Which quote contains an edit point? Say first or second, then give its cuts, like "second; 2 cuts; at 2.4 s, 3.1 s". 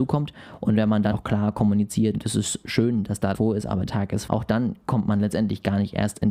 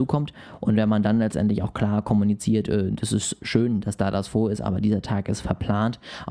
first; 5 cuts; at 1.1 s, 2.1 s, 3.3 s, 3.9 s, 4.3 s